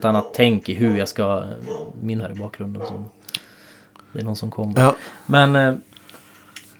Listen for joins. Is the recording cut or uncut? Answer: cut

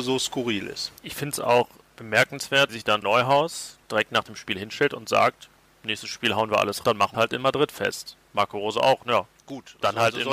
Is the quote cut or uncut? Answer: cut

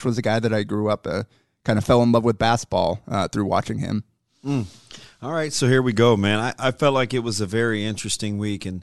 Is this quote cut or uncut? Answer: uncut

